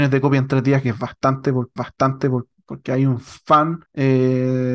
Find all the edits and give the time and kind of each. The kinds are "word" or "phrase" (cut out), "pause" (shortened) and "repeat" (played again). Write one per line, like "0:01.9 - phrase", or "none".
0:01.8 - repeat
0:03.9 - pause